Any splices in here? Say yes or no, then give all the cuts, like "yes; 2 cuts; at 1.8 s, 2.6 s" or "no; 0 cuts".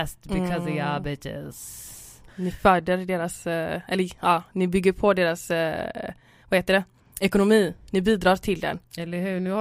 no; 0 cuts